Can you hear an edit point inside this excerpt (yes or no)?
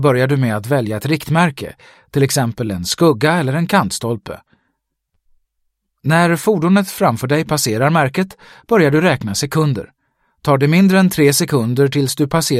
no